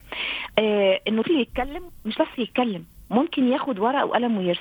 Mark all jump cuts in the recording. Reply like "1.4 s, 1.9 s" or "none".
1.2 s, 2.2 s